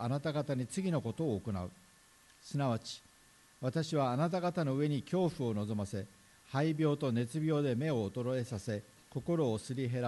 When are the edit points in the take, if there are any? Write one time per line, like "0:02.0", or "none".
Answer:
none